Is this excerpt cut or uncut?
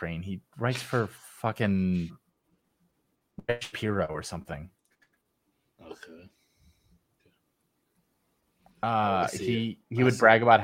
uncut